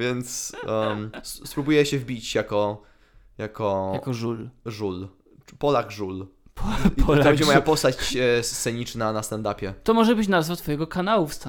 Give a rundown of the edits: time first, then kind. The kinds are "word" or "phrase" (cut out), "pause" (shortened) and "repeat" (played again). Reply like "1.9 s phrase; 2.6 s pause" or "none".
none